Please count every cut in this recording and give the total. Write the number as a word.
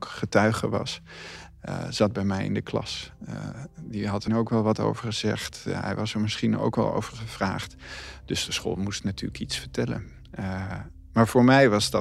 one